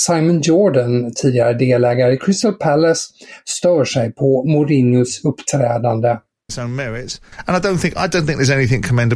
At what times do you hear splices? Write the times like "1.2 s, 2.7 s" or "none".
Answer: none